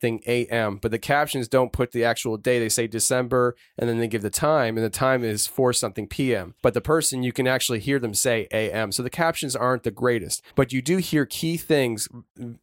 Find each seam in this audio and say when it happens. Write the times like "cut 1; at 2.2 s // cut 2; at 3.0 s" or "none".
cut 1; at 6.6 s // cut 2; at 10.5 s